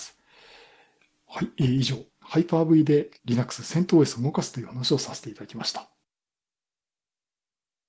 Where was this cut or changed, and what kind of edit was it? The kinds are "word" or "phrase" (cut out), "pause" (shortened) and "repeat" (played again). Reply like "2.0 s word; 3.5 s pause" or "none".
2.1 s pause; 3.2 s pause